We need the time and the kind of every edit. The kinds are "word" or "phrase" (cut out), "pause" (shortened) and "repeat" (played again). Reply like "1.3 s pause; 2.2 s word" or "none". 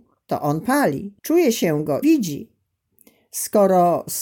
1.2 s pause; 2.0 s word